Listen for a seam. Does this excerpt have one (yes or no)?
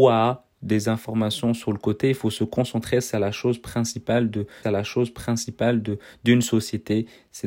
yes